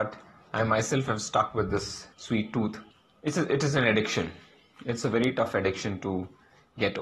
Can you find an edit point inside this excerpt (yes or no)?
yes